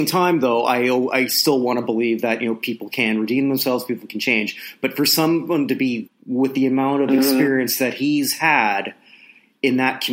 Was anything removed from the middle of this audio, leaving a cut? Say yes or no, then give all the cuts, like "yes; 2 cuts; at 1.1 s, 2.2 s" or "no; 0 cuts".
yes; 1 cut; at 6.1 s